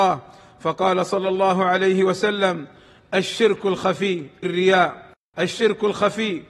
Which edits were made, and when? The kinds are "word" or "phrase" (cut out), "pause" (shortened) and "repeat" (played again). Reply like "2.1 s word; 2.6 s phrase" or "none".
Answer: 4.4 s word